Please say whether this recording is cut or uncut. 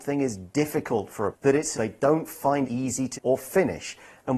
cut